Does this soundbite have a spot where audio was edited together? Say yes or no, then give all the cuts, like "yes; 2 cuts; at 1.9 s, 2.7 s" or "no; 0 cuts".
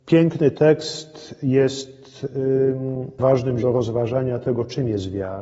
yes; 2 cuts; at 3.2 s, 3.6 s